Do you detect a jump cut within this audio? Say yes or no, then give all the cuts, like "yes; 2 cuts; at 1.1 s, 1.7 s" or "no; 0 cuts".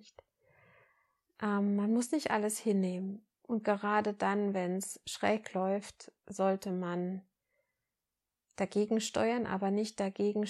no; 0 cuts